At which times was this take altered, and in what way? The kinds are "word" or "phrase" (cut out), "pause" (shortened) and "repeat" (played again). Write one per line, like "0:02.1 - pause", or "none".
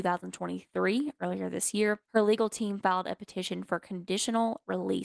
0:02.0 - pause